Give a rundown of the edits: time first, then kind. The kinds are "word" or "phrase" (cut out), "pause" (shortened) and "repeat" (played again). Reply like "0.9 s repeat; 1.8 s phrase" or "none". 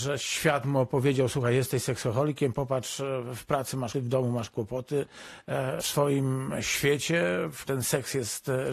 3.9 s word; 5.8 s word; 7.7 s word